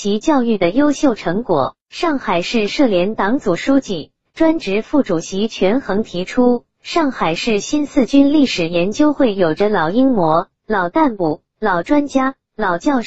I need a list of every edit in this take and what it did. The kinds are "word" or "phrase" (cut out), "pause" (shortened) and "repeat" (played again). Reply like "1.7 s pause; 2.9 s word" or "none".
1.8 s pause